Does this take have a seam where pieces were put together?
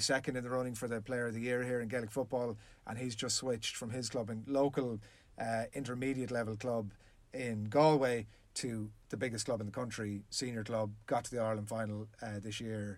no; 0 cuts

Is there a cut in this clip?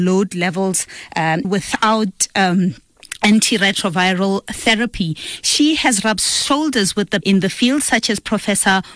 yes; 2 cuts; at 1.4 s, 7.2 s

